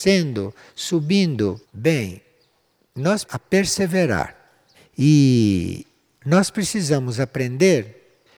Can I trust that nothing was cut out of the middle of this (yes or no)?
no